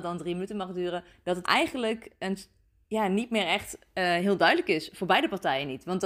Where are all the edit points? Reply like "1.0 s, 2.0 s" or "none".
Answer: 1.4 s